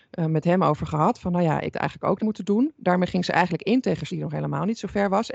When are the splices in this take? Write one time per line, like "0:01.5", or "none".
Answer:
0:01.7
0:02.2
0:04.1